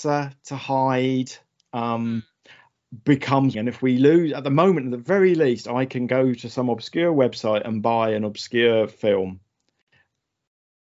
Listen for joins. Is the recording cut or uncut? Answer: cut